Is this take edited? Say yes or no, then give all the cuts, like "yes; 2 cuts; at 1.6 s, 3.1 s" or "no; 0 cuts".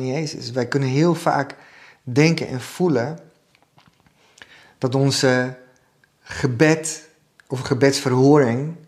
no; 0 cuts